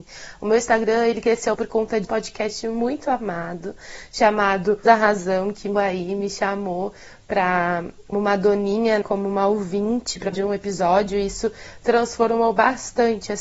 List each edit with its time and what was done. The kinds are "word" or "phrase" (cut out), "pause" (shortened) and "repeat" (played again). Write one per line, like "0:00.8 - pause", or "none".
0:01.5 - word
0:02.0 - word
0:04.8 - word
0:05.8 - word
0:08.1 - word
0:09.0 - word
0:10.3 - word